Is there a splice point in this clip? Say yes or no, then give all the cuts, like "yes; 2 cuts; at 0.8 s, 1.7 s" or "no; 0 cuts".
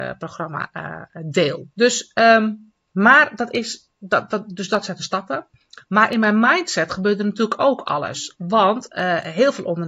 yes; 1 cut; at 1.7 s